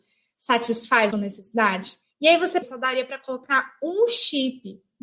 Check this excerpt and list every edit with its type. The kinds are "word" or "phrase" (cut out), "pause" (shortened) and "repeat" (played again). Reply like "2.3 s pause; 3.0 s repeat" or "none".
1.1 s phrase; 2.0 s pause; 2.6 s phrase

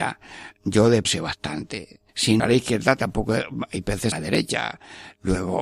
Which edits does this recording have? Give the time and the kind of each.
1.0 s word; 2.1 s pause; 2.4 s phrase; 4.1 s word

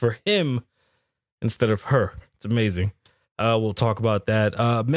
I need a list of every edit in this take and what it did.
none

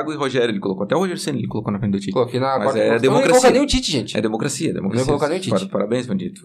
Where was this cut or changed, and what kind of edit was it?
none

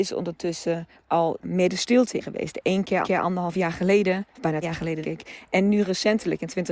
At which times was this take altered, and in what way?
1.4 s phrase; 2.2 s word; 3.0 s repeat; 4.3 s pause; 4.6 s word; 5.0 s word

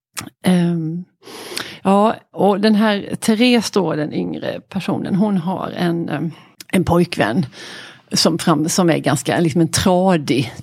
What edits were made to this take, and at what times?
6.5 s pause

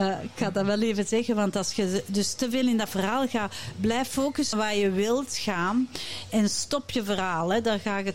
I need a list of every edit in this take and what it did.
4.5 s word

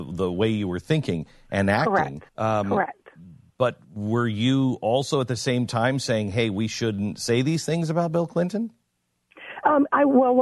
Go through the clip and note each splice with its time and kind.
2.3 s pause; 3.8 s pause

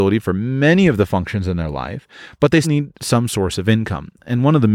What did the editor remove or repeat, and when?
2.6 s word

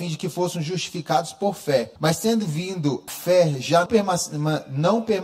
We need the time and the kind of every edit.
2.0 s pause; 3.1 s word; 3.9 s word

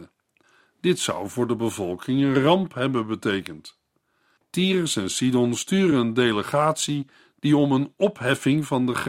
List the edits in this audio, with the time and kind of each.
none

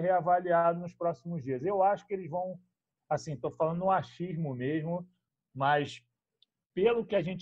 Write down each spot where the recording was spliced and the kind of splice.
none

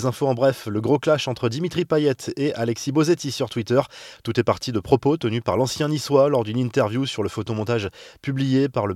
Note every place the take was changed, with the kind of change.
none

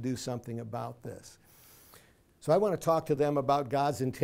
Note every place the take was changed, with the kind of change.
none

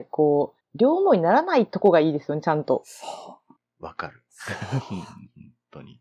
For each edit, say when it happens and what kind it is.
none

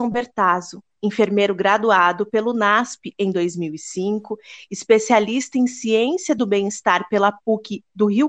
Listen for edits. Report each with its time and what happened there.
none

